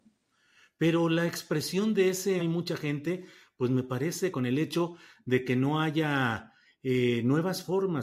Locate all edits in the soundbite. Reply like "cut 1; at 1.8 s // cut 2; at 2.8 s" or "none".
cut 1; at 2.4 s // cut 2; at 4.3 s